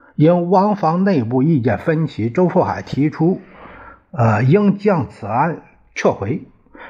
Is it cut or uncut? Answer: uncut